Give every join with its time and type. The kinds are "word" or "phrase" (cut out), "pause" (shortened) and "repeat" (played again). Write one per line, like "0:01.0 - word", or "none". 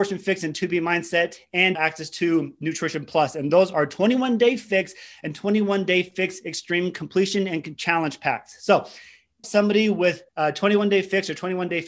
0:01.7 - word
0:09.4 - phrase
0:10.3 - word